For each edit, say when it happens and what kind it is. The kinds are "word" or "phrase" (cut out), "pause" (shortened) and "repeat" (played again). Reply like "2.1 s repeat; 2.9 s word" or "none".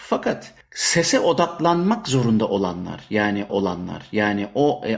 3.5 s repeat